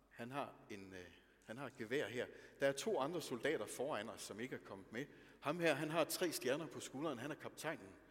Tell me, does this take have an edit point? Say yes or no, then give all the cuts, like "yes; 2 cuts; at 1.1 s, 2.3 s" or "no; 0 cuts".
no; 0 cuts